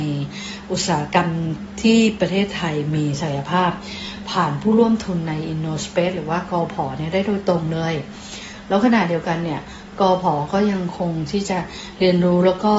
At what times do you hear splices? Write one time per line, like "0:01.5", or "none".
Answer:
none

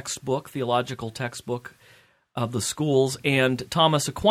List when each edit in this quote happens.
none

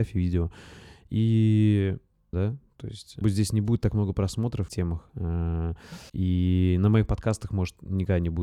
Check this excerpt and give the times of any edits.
0:02.3
0:03.2
0:04.7
0:06.1

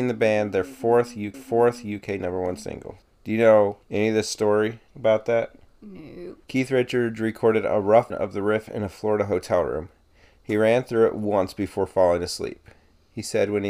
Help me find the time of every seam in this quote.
0:01.3
0:03.0
0:03.8
0:04.9
0:06.4
0:08.1

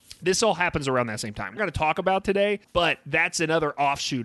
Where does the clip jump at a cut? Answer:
0:01.6
0:02.2
0:02.6

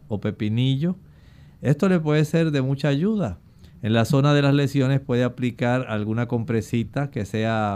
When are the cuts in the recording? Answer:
none

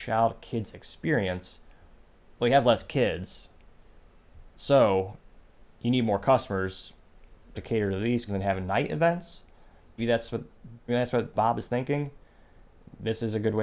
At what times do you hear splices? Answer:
0:07.5
0:08.3
0:10.0
0:10.9
0:11.4

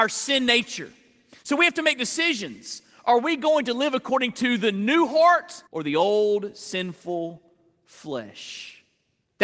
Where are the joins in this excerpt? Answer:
0:05.7

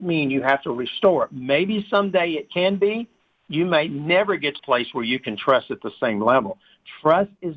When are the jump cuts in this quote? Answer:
0:04.6

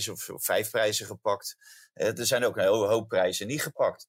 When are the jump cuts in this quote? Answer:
none

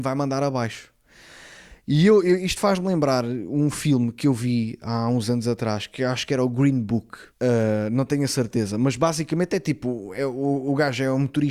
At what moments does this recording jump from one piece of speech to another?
0:07.3

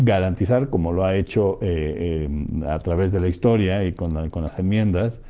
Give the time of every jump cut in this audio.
none

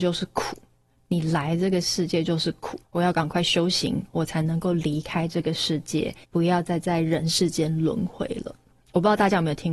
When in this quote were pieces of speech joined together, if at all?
0:02.8
0:06.2

